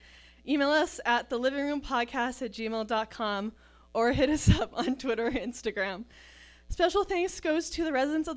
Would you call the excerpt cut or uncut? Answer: uncut